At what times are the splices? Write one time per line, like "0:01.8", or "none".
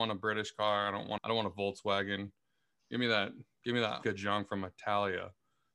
0:01.2
0:04.0